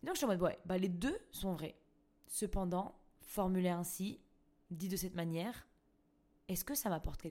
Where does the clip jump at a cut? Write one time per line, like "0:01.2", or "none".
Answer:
none